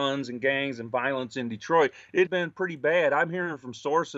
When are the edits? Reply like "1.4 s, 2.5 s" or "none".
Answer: 2.3 s

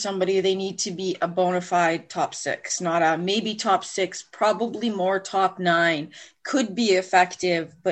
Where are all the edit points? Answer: none

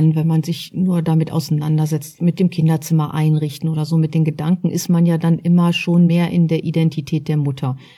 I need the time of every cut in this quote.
6.1 s

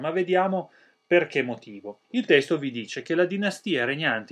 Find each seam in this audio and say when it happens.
2.0 s

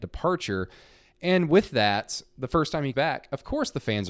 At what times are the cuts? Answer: 2.9 s

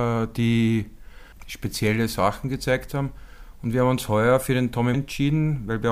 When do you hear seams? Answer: 4.9 s

